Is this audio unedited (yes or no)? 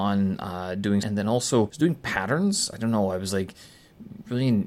no